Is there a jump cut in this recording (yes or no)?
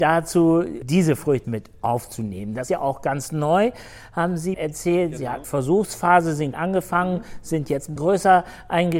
yes